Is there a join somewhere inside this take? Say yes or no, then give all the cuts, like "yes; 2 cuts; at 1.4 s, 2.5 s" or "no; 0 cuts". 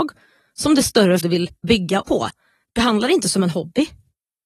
yes; 3 cuts; at 1.2 s, 1.6 s, 2.0 s